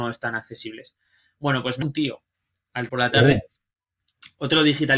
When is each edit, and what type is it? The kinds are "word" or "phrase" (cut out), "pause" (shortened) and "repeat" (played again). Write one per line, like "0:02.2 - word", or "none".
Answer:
0:01.8 - word
0:02.9 - word